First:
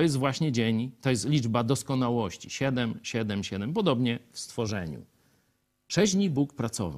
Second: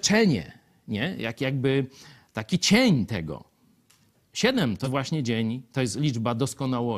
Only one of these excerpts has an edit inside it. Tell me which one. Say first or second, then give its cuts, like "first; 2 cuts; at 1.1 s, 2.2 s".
second; 1 cut; at 4.8 s